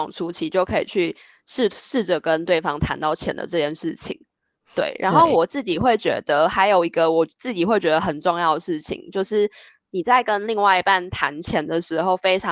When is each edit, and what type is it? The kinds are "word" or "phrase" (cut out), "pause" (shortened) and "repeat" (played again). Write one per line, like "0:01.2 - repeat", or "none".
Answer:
none

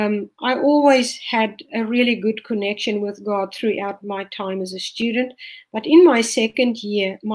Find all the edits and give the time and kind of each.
0:04.0 - word

